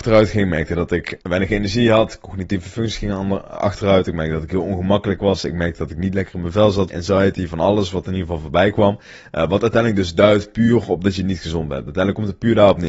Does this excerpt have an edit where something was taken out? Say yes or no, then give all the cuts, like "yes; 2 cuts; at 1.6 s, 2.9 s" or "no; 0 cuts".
yes; 2 cuts; at 1.2 s, 6.9 s